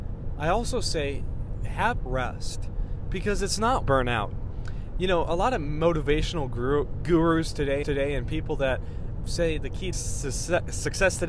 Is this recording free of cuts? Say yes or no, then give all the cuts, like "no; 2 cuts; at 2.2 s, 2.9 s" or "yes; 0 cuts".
no; 5 cuts; at 2.1 s, 3.8 s, 7.8 s, 9.2 s, 9.9 s